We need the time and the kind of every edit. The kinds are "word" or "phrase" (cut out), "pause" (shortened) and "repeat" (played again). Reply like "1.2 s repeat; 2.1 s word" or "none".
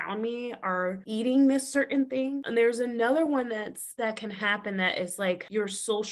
none

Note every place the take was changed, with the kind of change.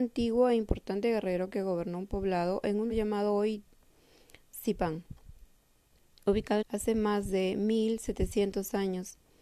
2.9 s word; 6.6 s word

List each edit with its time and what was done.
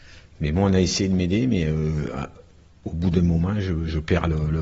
none

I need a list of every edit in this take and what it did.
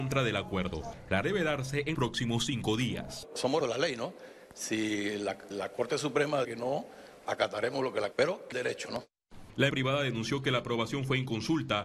1.2 s word; 1.9 s word; 3.6 s word; 5.5 s word; 6.4 s word; 7.3 s word; 8.1 s word; 8.5 s word; 9.7 s word

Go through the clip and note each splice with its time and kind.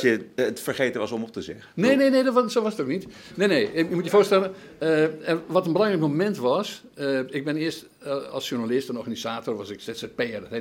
none

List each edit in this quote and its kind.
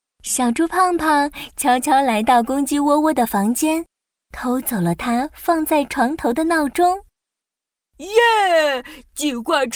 none

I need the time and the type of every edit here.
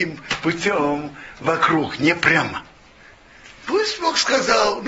none

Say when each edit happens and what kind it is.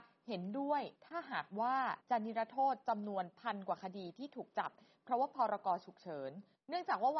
1.0 s pause; 2.0 s pause

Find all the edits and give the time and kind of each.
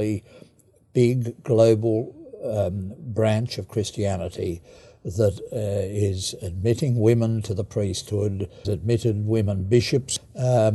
8.6 s word

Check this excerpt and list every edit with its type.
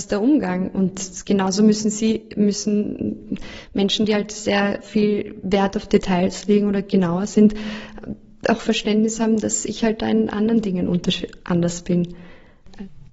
none

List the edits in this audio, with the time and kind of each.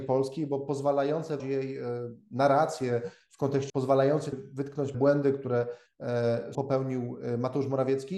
1.4 s word; 3.7 s word; 4.3 s word; 4.9 s word; 5.9 s word; 6.5 s word

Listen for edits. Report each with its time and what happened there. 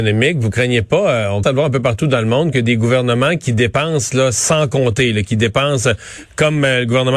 1.4 s word

